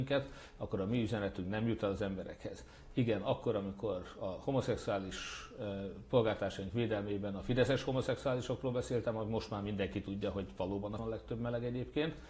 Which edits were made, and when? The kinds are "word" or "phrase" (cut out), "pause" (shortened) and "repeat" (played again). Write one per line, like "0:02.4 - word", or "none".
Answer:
0:11.0 - word